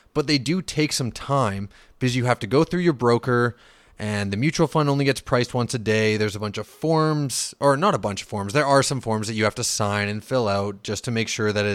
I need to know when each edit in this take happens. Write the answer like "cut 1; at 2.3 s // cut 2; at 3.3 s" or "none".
none